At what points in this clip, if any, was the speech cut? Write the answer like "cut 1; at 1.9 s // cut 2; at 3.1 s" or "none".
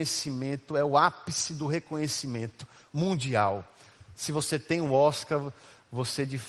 none